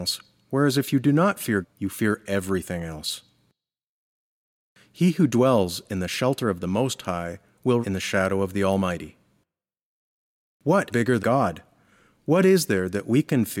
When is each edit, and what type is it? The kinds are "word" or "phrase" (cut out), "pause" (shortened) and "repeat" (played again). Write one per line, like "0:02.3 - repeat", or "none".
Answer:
0:01.6 - word
0:07.8 - word
0:10.9 - word
0:11.2 - word